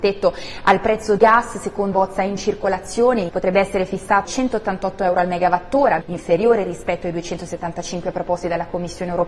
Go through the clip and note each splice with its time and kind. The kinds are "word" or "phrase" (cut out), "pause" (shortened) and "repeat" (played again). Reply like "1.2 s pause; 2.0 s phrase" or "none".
1.2 s word; 1.9 s word; 3.3 s word; 4.2 s word; 6.0 s word